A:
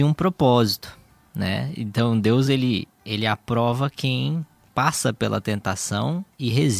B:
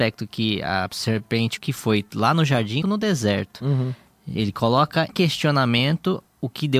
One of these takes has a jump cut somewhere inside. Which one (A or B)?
B